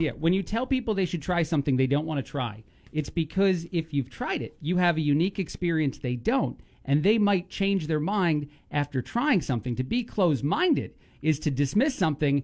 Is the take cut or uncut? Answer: uncut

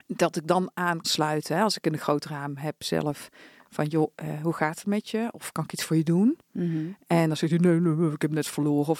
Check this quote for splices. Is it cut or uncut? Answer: cut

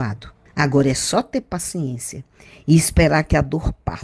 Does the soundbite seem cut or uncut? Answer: uncut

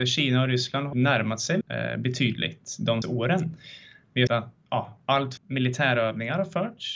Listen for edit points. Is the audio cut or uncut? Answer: cut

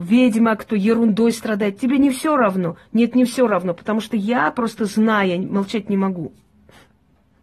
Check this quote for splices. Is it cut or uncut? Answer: uncut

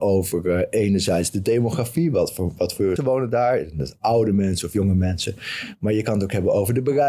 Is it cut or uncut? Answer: cut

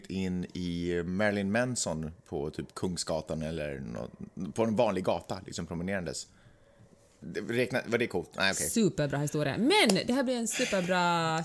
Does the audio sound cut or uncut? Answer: cut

